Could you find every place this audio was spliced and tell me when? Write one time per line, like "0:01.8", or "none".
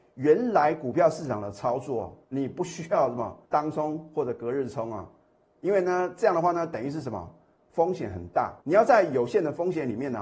0:02.2
0:03.4
0:08.6